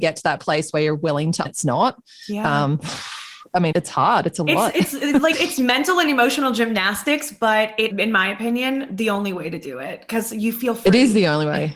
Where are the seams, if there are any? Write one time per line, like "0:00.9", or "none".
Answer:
0:01.4
0:03.7
0:05.3
0:07.9